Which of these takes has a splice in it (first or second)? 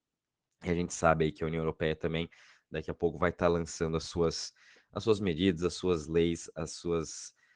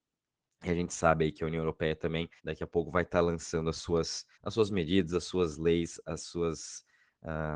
second